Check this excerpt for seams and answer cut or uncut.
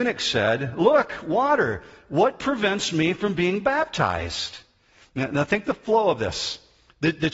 uncut